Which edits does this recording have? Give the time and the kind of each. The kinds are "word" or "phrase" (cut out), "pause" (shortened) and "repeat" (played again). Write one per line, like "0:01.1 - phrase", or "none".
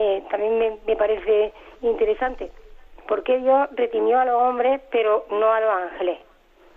0:01.7 - pause